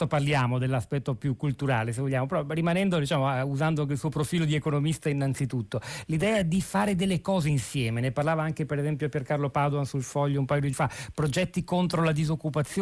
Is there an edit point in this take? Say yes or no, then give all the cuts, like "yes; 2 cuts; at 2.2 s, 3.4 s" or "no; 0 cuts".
yes; 1 cut; at 10.7 s